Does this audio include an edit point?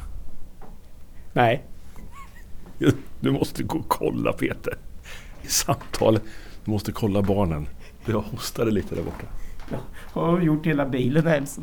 yes; 1 cut; at 5.4 s

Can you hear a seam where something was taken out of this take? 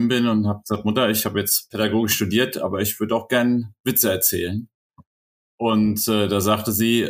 no; 0 cuts

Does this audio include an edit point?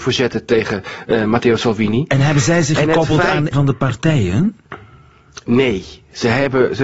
yes; 1 cut; at 3.5 s

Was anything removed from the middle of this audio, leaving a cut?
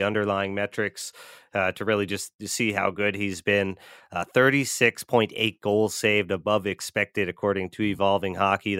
no; 0 cuts

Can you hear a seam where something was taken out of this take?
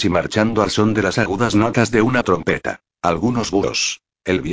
no; 0 cuts

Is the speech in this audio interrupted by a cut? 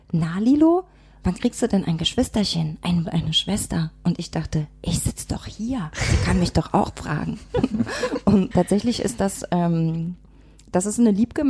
yes; 2 cuts; at 3.0 s, 8.5 s

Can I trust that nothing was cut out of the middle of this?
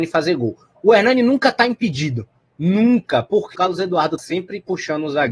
no; 2 cuts; at 3.5 s, 4.2 s

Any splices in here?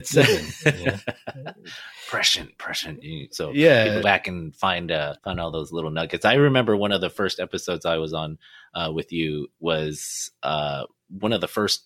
yes; 2 cuts; at 4.0 s, 5.2 s

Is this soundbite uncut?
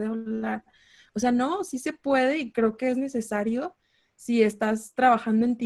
yes; 0 cuts

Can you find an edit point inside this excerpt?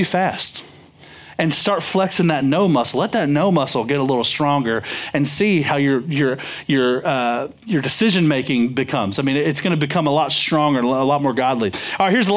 no; 0 cuts

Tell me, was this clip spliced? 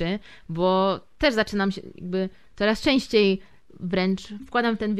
no; 0 cuts

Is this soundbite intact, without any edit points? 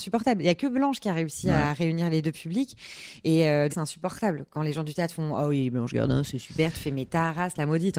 no; 1 cut; at 3.7 s

